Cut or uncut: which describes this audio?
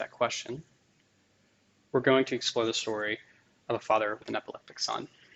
uncut